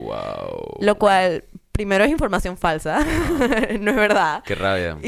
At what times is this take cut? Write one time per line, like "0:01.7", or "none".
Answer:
none